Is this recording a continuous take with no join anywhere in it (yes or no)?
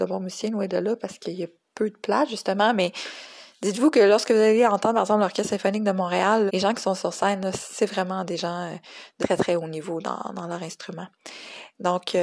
no